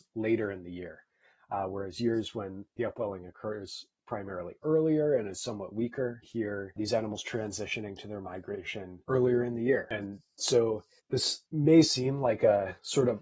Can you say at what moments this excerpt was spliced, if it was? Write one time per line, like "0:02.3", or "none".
0:02.7
0:06.2